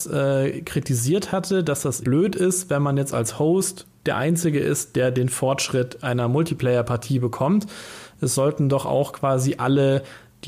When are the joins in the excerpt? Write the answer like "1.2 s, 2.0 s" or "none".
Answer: 2.0 s, 4.0 s